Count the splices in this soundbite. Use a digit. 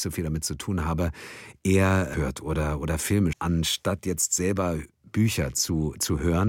2